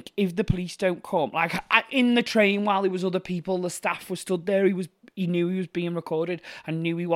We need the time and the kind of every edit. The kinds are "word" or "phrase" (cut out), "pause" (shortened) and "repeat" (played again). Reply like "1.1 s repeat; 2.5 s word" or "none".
none